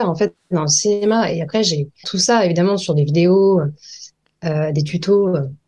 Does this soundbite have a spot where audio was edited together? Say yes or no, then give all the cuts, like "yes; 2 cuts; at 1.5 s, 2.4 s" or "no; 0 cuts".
yes; 1 cut; at 2.0 s